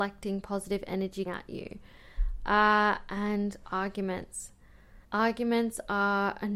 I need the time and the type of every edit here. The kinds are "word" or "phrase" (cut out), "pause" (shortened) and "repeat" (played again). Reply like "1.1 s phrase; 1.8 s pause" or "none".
1.3 s word; 5.0 s pause